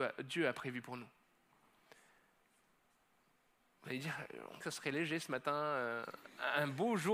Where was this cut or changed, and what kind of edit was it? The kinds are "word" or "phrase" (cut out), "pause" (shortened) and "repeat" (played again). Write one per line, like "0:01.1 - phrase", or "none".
0:04.6 - word